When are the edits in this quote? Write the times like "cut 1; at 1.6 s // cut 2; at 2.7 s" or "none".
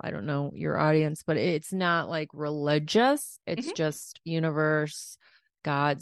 none